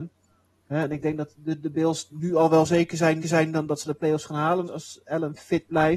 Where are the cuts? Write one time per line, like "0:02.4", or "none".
0:03.2
0:04.7